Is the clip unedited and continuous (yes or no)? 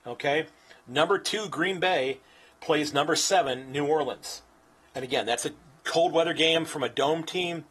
yes